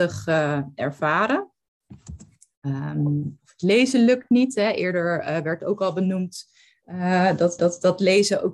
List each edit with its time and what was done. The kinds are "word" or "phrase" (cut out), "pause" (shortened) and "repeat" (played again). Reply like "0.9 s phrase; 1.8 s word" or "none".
7.6 s repeat